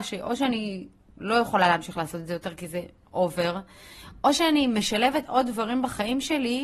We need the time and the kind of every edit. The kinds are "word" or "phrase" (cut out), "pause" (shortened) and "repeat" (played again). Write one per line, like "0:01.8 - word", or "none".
none